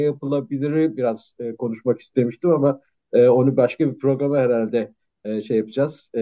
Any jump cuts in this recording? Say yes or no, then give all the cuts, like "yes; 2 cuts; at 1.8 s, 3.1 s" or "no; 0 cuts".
no; 0 cuts